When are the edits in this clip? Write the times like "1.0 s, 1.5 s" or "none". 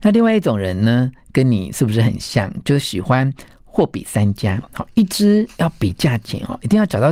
none